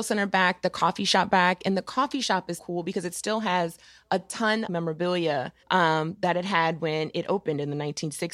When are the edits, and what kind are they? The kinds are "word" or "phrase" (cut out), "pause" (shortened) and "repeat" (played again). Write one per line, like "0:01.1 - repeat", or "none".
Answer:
0:02.6 - word
0:04.7 - phrase
0:05.6 - pause

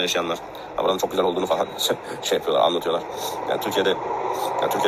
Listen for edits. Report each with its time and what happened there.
none

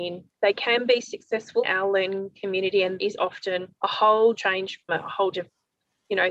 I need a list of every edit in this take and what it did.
0:01.6 - word
0:03.0 - word
0:03.8 - pause
0:04.9 - phrase
0:05.3 - word

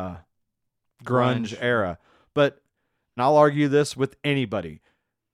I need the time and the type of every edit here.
0:03.2 - phrase

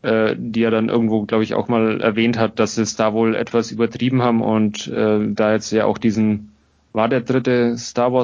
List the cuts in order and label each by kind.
none

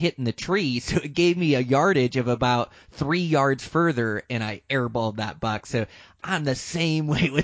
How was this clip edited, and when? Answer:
none

